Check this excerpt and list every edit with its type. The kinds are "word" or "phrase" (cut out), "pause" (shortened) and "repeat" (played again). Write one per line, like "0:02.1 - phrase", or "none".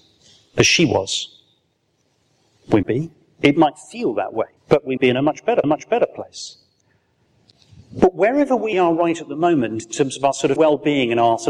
0:02.8 - word
0:04.6 - pause
0:05.0 - word
0:05.6 - repeat
0:08.7 - word
0:10.6 - word